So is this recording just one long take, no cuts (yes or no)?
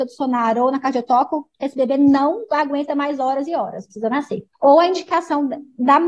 no